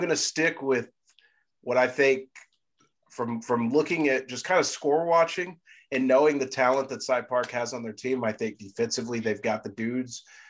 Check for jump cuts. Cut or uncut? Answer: uncut